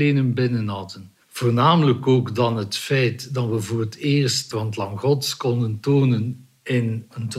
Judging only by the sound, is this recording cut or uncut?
cut